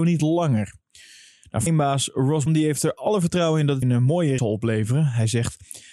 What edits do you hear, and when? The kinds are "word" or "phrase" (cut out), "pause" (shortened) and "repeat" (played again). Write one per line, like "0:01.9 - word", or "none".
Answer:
0:01.7 - word
0:02.5 - word
0:03.8 - word
0:04.4 - word